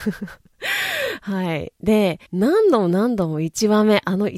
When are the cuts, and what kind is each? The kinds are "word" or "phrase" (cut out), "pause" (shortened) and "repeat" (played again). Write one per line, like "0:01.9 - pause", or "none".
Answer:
0:02.3 - pause